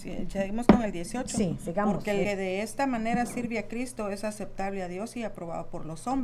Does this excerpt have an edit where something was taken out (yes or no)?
yes